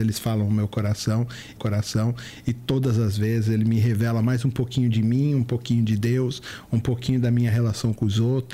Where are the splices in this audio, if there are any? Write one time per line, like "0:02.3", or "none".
0:01.6